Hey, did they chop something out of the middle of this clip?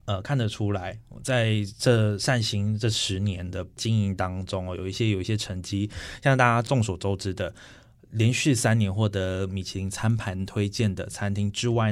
no; 0 cuts

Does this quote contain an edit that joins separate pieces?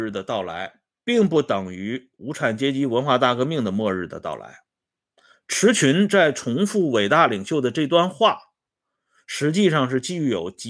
no; 0 cuts

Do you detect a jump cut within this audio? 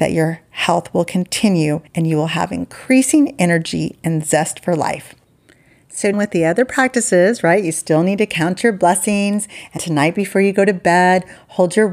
yes; 3 cuts; at 1.9 s, 6.1 s, 9.8 s

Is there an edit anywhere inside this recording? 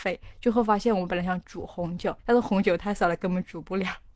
yes; 1 cut; at 2.2 s

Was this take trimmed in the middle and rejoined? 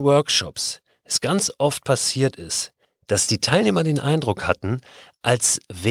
no; 0 cuts

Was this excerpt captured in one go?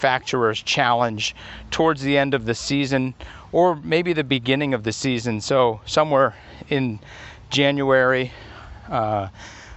yes; 0 cuts

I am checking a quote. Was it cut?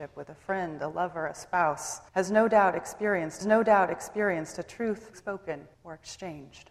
yes; 4 cuts; at 2.1 s, 3.4 s, 5.1 s, 5.7 s

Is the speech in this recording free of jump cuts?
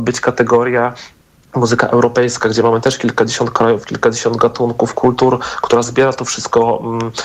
yes; 0 cuts

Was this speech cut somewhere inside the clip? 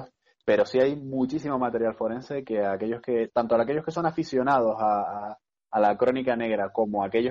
no; 0 cuts

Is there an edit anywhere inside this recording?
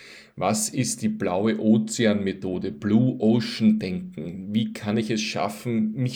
no; 0 cuts

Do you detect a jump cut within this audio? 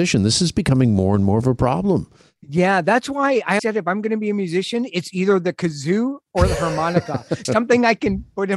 yes; 2 cuts; at 3.6 s, 7.4 s

